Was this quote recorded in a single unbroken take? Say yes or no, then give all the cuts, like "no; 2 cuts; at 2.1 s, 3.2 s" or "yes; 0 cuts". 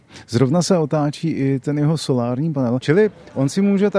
yes; 0 cuts